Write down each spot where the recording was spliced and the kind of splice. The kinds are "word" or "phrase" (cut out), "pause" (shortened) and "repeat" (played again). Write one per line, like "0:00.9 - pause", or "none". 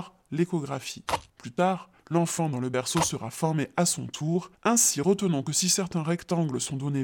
0:01.3 - pause
0:02.0 - pause

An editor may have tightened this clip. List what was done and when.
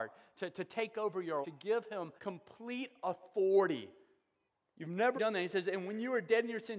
0:01.4 - word
0:02.2 - pause
0:04.5 - pause
0:05.1 - word

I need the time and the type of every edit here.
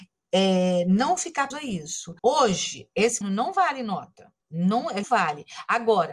0:01.5 - word
0:02.2 - pause
0:03.2 - word
0:04.4 - pause
0:05.0 - word

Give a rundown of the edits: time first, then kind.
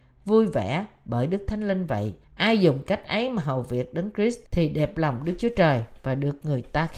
0:02.2 - pause
0:04.5 - pause

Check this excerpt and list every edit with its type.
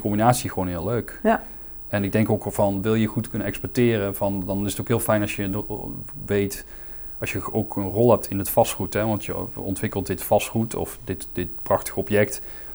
none

